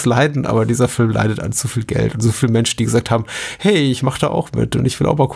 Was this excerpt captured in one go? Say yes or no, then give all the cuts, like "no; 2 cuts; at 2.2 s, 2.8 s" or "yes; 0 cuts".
yes; 0 cuts